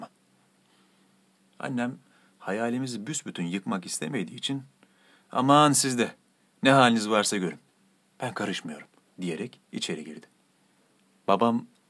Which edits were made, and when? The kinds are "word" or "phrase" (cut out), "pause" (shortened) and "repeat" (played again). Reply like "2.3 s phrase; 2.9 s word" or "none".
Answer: none